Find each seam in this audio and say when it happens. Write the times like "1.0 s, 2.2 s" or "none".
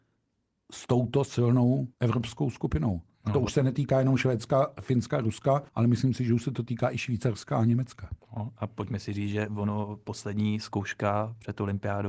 1.9 s, 5.7 s